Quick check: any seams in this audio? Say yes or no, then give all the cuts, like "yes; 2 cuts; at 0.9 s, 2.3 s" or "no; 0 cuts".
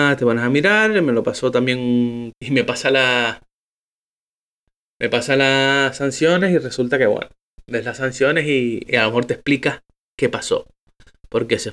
yes; 2 cuts; at 2.3 s, 8.9 s